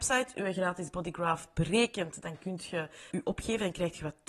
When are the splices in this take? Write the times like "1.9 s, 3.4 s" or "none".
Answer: 3.1 s